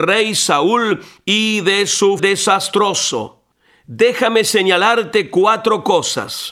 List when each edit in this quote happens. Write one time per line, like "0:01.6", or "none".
0:02.2